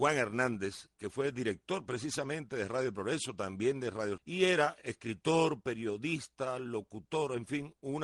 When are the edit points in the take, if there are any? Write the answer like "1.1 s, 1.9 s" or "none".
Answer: 4.2 s

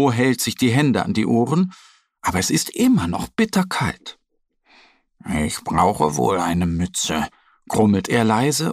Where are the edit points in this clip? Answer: none

